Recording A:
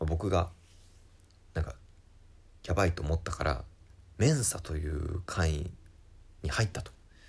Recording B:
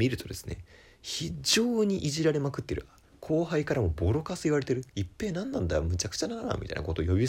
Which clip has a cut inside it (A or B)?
B